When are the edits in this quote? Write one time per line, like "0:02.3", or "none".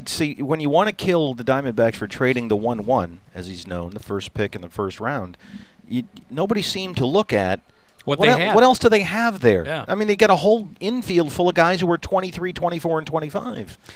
none